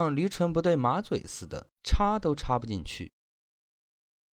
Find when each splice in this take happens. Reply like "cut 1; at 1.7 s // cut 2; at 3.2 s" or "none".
cut 1; at 1.7 s